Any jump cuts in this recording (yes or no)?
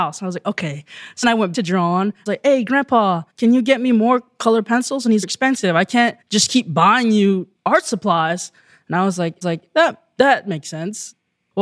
yes